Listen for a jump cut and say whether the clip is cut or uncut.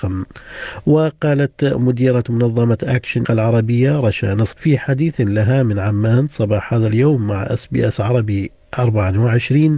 cut